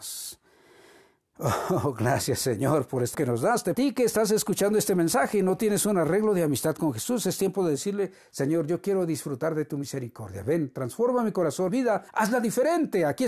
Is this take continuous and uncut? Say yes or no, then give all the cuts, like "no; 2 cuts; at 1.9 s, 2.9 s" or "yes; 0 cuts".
no; 4 cuts; at 3.1 s, 3.7 s, 11.7 s, 12.1 s